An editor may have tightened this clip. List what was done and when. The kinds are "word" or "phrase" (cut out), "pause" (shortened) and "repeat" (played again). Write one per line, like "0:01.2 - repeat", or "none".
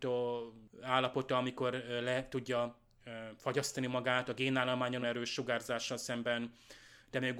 0:05.0 - word